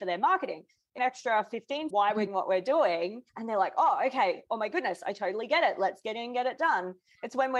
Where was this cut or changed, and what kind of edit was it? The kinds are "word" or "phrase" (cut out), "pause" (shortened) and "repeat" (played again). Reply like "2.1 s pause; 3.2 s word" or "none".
1.0 s phrase; 1.9 s phrase; 2.3 s word; 3.3 s pause

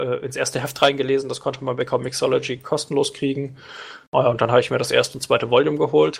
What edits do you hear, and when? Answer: none

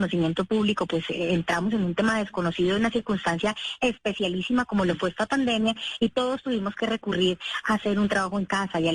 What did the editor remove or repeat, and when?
none

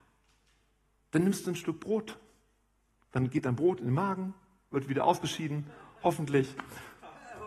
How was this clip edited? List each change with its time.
none

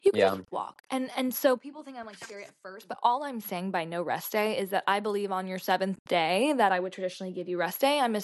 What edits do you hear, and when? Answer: none

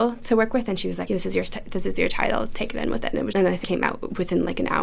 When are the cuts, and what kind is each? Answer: 1.1 s word; 2.8 s word; 3.3 s word; 3.6 s word

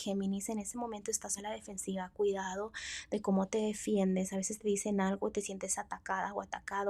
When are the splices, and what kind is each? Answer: 1.4 s word

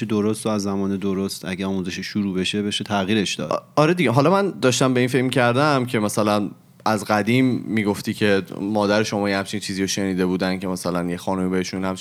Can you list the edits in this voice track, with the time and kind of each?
none

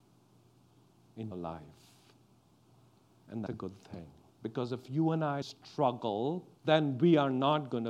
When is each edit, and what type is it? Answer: 1.3 s word; 3.5 s word; 4.3 s pause; 5.4 s word; 6.6 s pause

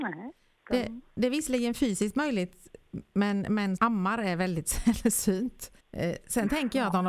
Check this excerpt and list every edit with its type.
3.8 s word; 5.8 s pause

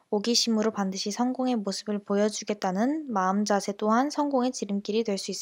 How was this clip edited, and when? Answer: none

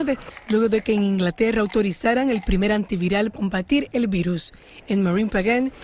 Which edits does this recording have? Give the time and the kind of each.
3.3 s word

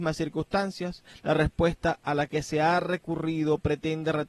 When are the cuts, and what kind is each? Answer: none

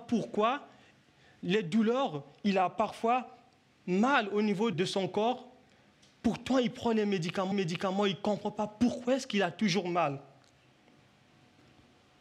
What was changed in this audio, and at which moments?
4.7 s word; 7.5 s repeat

